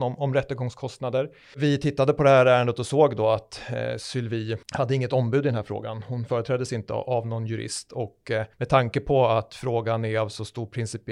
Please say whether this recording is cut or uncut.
cut